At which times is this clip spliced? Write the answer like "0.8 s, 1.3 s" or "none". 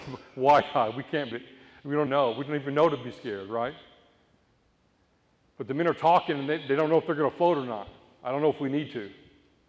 1.3 s, 2.1 s